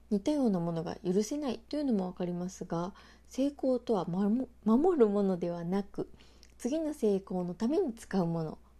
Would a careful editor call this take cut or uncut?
uncut